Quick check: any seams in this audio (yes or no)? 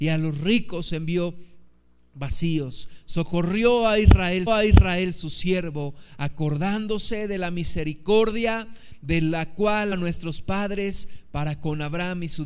yes